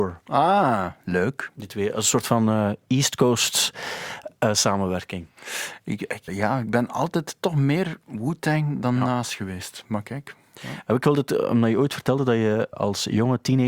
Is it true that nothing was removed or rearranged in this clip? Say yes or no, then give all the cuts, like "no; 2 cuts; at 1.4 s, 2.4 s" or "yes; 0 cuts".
no; 2 cuts; at 6.3 s, 12.7 s